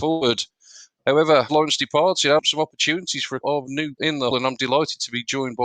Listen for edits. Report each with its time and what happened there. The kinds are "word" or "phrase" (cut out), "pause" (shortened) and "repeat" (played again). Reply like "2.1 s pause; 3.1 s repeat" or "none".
1.5 s word; 2.4 s word; 3.4 s word; 4.0 s word; 4.3 s word

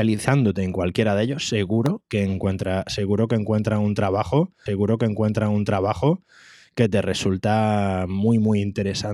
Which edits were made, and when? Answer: 4.7 s repeat

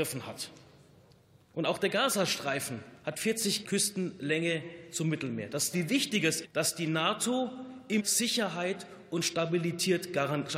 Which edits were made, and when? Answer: 3.0 s pause; 3.6 s word; 5.7 s word; 6.4 s word; 8.0 s word

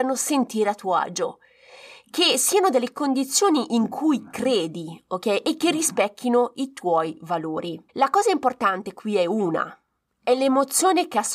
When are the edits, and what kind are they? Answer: 7.9 s pause

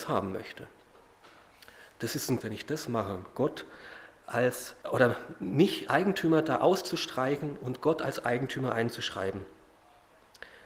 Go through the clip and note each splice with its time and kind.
2.4 s phrase; 4.8 s pause; 5.9 s word

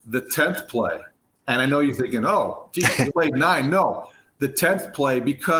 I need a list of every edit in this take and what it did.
3.1 s word

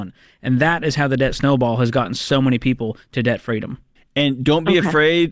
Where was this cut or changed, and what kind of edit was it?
3.9 s pause

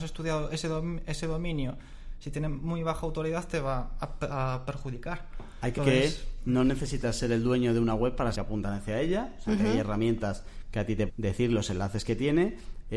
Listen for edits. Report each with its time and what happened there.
5.8 s word; 8.3 s phrase; 11.1 s word

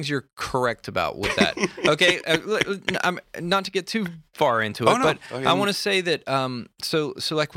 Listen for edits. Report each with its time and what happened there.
none

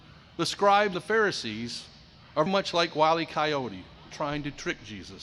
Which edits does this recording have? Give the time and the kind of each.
0.9 s word; 2.5 s word; 4.1 s word

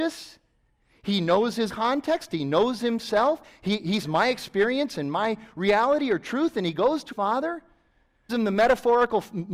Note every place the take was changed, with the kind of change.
1.7 s word; 4.0 s word; 7.1 s word; 8.3 s word

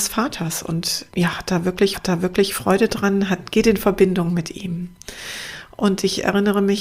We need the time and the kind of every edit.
1.1 s pause; 1.9 s repeat

